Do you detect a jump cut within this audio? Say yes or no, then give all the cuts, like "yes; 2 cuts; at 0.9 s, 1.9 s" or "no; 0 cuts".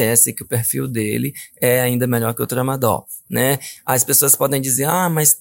no; 0 cuts